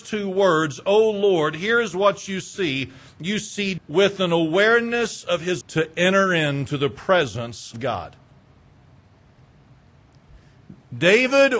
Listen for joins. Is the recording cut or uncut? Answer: cut